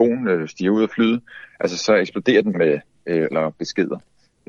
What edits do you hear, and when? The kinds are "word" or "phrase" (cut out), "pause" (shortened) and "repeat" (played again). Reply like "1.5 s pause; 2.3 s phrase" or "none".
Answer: 2.5 s word; 3.3 s word

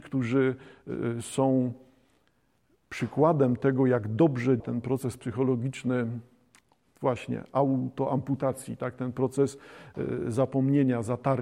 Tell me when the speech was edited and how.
4.6 s word

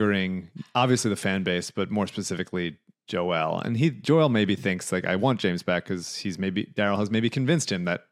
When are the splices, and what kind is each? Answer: 2.9 s pause

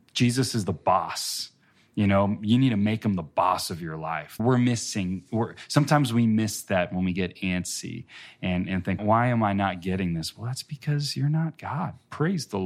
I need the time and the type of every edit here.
4.4 s word; 9.0 s word

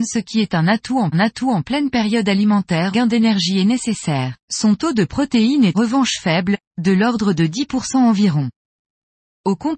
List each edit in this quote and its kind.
1.1 s repeat; 2.9 s phrase; 4.4 s pause; 5.7 s word

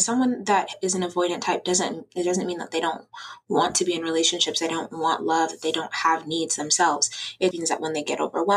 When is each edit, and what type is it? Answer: 7.5 s word

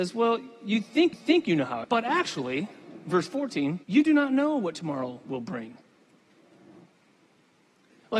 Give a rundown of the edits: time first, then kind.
1.1 s repeat; 1.8 s phrase; 3.8 s pause

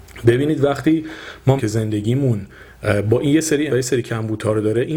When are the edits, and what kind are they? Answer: 1.6 s word; 3.7 s word

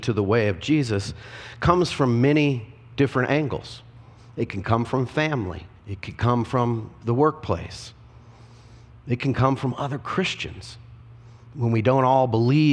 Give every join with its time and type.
5.8 s pause

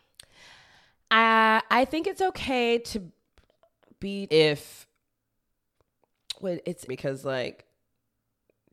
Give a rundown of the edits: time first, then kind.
4.3 s word; 6.9 s word

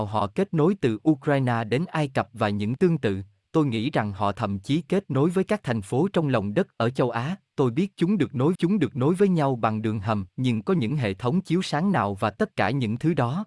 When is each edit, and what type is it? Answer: 2.8 s word; 8.6 s repeat; 10.3 s pause

